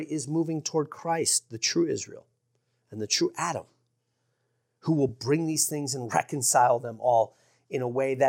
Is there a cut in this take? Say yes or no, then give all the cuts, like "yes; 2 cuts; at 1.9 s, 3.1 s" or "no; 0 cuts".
no; 0 cuts